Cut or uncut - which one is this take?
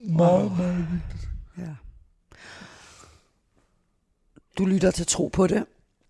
uncut